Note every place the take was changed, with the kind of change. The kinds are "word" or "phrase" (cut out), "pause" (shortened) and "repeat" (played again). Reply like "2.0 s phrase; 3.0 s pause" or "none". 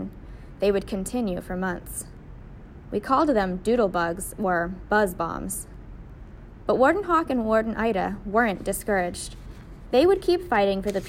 none